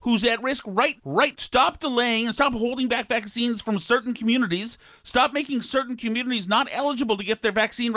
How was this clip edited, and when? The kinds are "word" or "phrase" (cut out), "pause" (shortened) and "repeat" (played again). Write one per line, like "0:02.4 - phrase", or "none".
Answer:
0:01.0 - word
0:01.3 - word

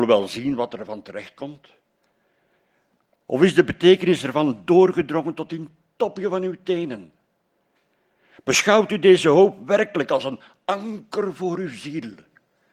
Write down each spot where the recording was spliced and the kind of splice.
none

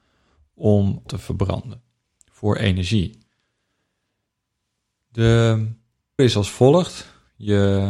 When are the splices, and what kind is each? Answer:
0:01.1 - word
0:06.2 - word

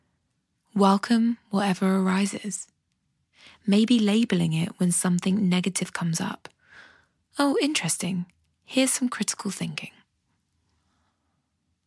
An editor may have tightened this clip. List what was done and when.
none

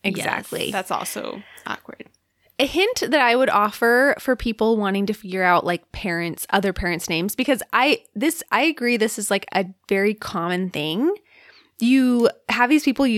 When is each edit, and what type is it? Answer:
none

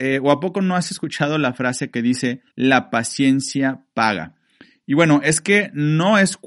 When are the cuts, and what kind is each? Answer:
0:02.5 - pause

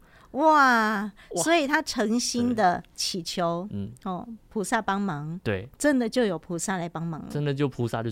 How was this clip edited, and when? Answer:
none

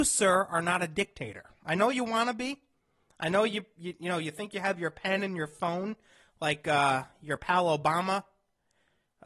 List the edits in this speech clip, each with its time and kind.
none

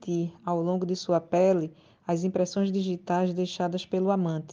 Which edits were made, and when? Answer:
none

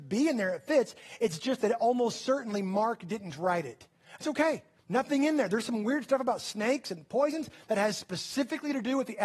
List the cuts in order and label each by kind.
0:04.2 - word
0:04.8 - pause

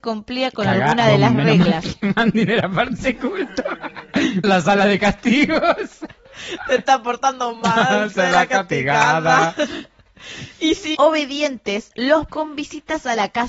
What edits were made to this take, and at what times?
0:03.0 - word
0:04.4 - word
0:10.9 - word
0:12.3 - word

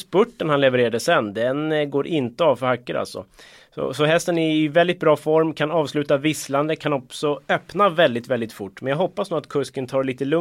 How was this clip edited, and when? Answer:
none

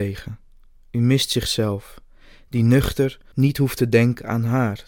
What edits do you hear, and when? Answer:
0:03.3 - word

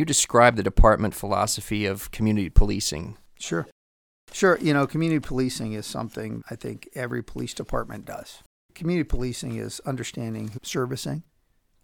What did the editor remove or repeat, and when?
0:06.4 - word
0:10.6 - word

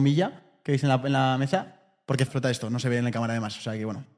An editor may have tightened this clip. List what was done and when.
0:02.3 - word

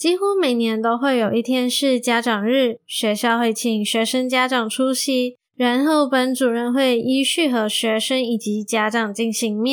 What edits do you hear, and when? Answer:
0:05.5 - pause

